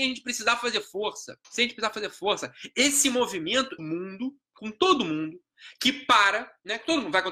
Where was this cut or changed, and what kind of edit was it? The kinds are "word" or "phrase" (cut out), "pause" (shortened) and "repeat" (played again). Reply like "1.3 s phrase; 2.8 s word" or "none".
1.4 s pause; 3.8 s phrase